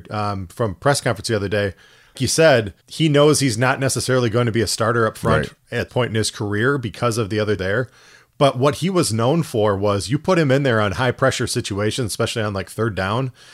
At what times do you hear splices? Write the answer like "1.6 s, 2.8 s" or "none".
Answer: 2.1 s, 2.8 s, 5.9 s, 7.6 s